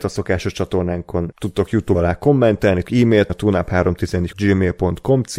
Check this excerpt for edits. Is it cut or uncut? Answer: cut